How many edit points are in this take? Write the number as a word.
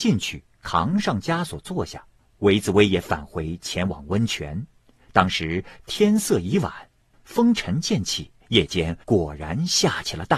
three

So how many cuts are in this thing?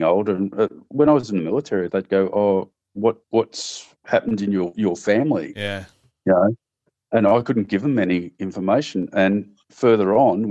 three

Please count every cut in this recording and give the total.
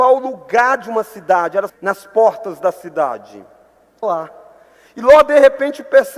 two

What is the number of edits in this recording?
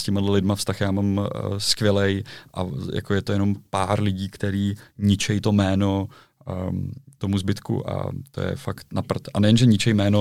zero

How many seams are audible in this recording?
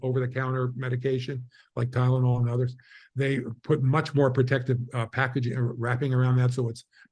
zero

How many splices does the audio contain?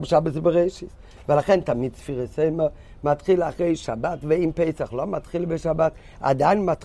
zero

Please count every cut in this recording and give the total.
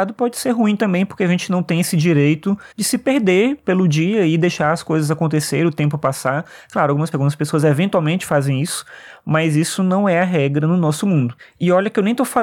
two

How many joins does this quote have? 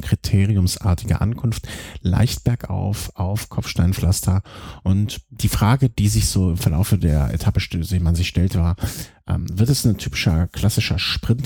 zero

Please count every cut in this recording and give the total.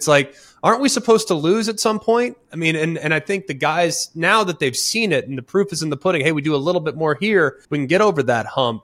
one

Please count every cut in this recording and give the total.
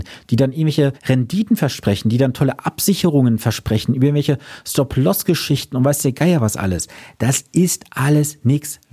one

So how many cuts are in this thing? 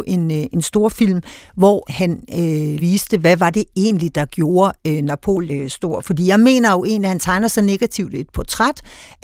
three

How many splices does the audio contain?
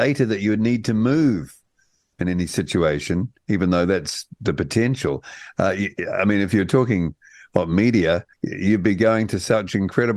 one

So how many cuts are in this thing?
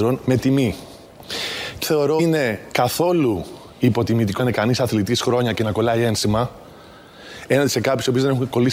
three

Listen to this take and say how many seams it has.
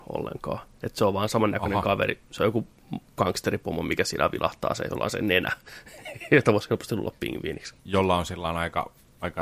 one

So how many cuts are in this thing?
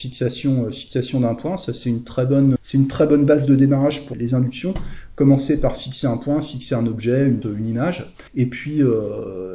four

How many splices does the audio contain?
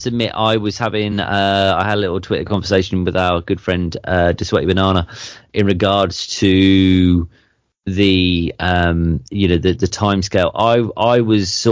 zero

